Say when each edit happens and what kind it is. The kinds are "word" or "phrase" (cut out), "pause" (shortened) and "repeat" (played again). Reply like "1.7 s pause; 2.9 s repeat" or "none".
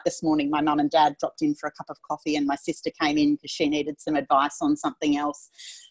none